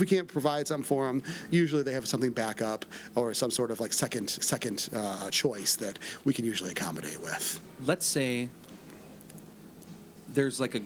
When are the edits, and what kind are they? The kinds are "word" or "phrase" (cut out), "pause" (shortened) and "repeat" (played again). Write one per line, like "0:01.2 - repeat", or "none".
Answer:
0:04.4 - repeat